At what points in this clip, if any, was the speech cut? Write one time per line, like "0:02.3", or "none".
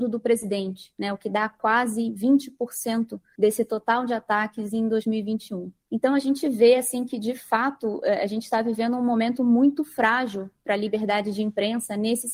none